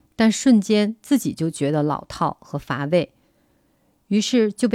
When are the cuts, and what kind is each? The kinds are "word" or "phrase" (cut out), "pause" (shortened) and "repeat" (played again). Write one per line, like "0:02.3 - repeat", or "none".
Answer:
none